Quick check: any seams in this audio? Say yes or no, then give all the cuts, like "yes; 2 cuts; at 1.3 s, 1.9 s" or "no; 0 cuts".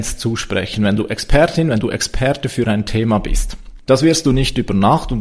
no; 0 cuts